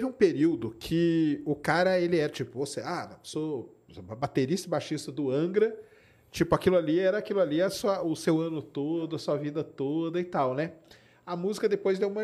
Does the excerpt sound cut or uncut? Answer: uncut